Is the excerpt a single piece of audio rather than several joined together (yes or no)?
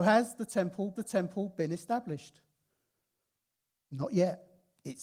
no